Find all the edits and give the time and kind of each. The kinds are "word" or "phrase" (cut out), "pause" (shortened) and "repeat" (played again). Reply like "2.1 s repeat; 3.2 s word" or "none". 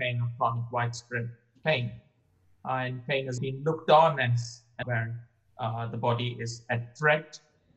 3.4 s word; 4.8 s word